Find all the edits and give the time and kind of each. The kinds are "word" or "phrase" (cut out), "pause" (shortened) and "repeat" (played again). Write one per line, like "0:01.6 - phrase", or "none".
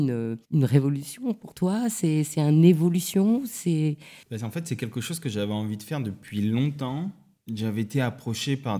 0:04.2 - pause